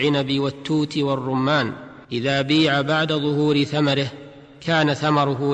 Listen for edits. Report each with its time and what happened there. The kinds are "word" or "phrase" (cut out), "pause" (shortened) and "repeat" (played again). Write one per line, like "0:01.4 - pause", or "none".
0:02.0 - pause